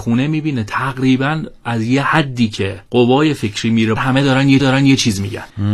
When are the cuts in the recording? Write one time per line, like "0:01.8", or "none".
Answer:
0:04.0
0:04.6